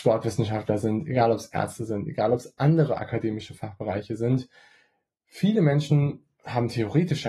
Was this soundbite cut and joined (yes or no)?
no